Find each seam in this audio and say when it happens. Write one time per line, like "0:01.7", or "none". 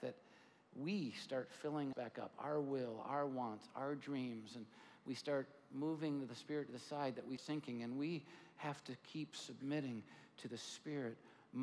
0:01.9
0:07.4